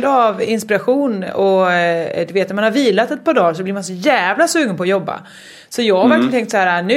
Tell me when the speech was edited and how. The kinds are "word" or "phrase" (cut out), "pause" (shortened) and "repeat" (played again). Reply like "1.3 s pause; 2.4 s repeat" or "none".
none

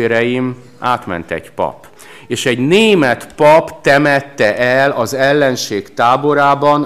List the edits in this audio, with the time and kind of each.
none

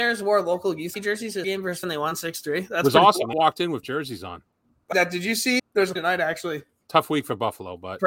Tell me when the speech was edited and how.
0.9 s word; 1.4 s word; 1.8 s word; 3.3 s word; 3.8 s word; 4.9 s word; 5.6 s word; 6.0 s word

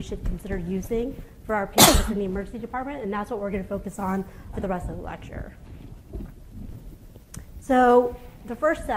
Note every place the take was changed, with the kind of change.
4.5 s word

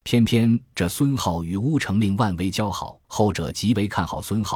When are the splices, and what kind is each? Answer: 3.0 s pause

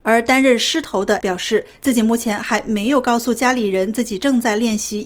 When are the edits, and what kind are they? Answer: 1.2 s word

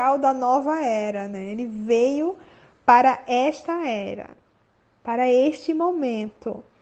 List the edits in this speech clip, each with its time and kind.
none

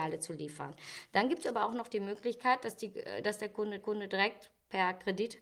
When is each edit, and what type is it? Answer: 3.8 s repeat

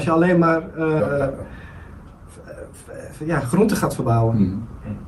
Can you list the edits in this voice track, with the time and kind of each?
1.0 s word

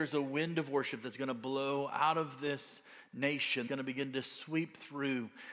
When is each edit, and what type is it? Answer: 3.7 s word

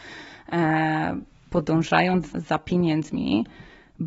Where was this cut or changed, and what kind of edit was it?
2.3 s word

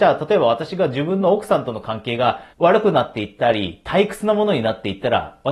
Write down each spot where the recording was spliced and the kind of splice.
2.5 s pause

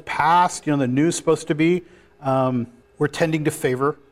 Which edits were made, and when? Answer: 2.8 s pause

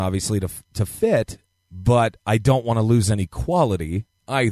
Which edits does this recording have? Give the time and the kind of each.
none

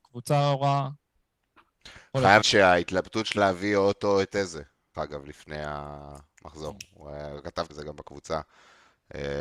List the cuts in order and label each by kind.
2.4 s word; 3.4 s word; 4.9 s word; 7.7 s word

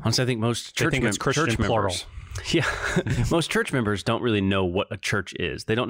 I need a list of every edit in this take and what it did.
none

